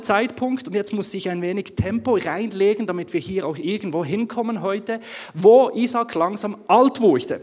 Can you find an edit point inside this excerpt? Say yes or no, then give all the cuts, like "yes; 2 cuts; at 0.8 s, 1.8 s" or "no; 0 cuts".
no; 0 cuts